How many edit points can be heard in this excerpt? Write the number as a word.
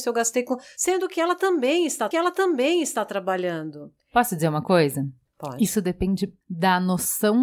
two